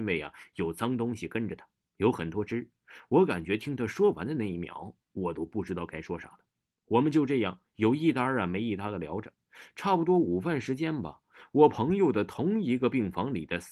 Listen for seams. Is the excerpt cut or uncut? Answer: uncut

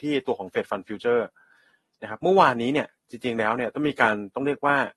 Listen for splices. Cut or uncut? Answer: uncut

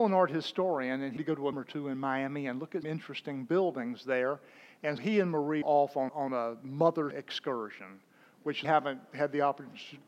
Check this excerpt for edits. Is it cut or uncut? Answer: cut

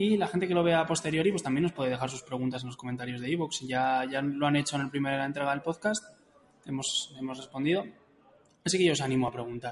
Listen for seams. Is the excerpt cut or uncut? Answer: uncut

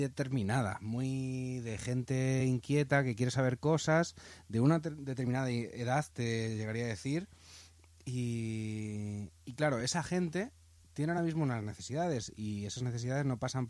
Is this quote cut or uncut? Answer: uncut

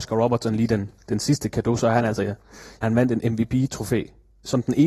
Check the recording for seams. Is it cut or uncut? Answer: cut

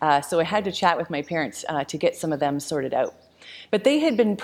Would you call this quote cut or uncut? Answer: uncut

